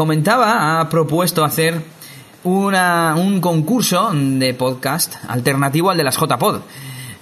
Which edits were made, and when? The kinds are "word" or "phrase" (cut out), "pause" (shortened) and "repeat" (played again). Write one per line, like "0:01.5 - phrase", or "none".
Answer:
none